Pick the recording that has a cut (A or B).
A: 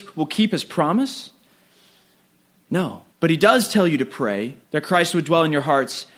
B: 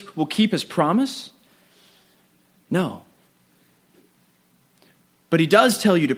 A